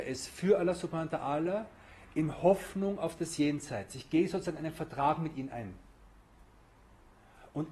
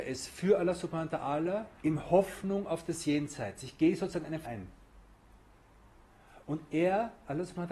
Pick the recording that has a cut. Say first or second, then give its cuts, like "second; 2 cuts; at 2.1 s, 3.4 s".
second; 2 cuts; at 1.8 s, 4.4 s